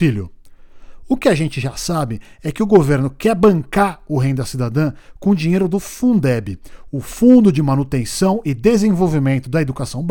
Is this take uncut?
yes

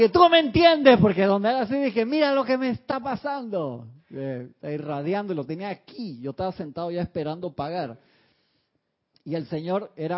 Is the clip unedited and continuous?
yes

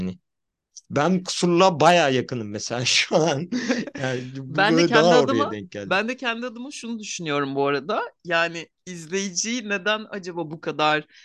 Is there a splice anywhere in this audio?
no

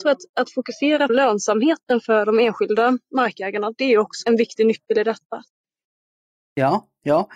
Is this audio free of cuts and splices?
no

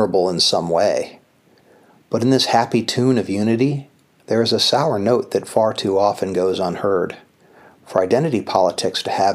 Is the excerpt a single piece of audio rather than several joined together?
yes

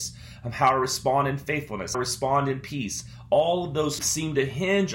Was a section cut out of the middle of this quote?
yes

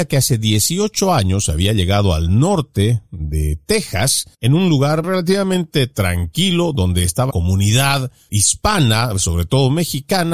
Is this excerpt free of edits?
no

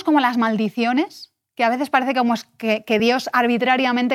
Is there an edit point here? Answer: no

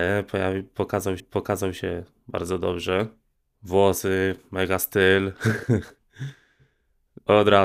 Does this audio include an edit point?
yes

